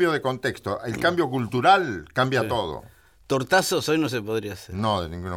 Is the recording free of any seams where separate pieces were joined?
yes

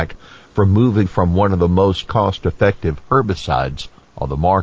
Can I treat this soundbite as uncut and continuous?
no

